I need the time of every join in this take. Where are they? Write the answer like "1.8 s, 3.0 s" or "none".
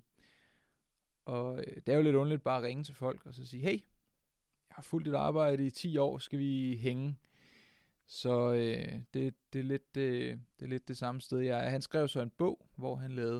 none

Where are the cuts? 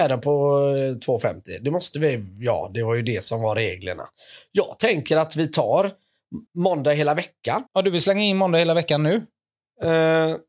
6.5 s, 7.7 s

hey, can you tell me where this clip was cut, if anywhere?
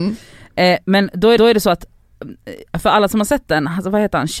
1.4 s

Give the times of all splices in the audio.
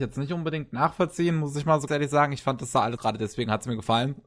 1.9 s, 3.0 s

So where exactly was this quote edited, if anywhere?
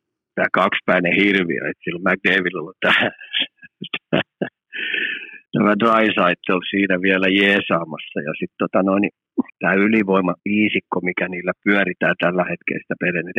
5.5 s, 9.5 s, 10.4 s

